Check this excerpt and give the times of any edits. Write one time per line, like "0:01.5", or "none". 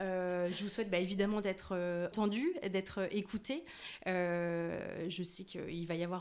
0:02.1

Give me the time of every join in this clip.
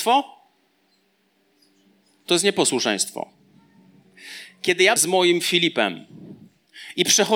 0:05.0

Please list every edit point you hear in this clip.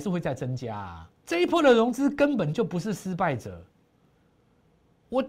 0:01.2

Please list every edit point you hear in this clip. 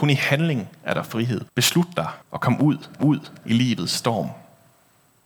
0:01.5
0:02.2
0:03.0

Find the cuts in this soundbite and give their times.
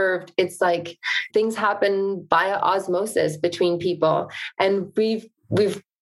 0:01.3

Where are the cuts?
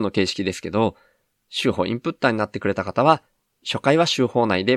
none

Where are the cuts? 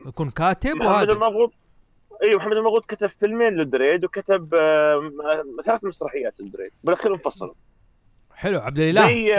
0:06.8

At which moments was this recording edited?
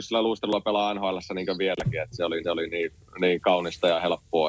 0:02.4

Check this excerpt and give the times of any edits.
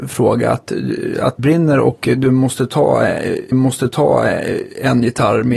0:01.4
0:03.5

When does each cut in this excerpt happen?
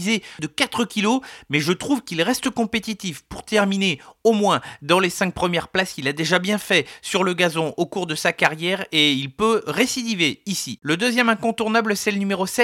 none

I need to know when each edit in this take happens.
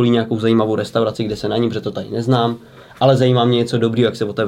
none

